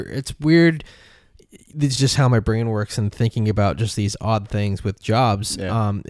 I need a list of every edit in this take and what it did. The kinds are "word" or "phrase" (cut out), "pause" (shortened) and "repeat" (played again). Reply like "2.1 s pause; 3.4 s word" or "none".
none